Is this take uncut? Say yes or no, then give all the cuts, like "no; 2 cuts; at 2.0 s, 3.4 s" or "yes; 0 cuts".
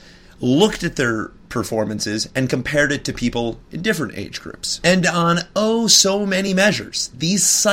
yes; 0 cuts